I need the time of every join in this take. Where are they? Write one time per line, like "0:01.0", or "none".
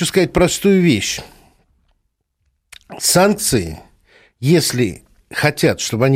none